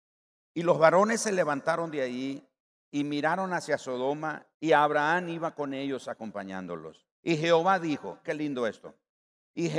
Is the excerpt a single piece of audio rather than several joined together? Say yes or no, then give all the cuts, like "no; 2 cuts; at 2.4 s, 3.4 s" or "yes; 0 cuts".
no; 4 cuts; at 2.6 s, 4.5 s, 7.1 s, 8.2 s